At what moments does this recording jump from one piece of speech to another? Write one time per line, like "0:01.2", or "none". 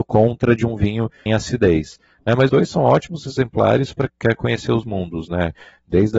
0:01.3
0:02.5
0:04.1
0:04.8